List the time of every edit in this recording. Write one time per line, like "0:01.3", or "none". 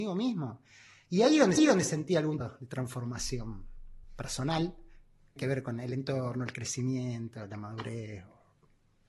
0:01.6
0:02.4
0:04.0
0:05.4